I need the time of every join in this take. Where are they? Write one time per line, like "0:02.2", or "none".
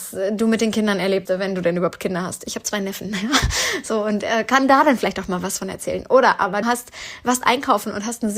0:01.3
0:06.6